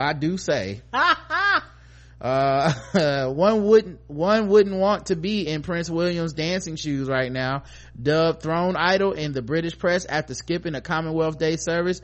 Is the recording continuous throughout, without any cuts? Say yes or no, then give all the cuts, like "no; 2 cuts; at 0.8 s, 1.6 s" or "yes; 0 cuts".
yes; 0 cuts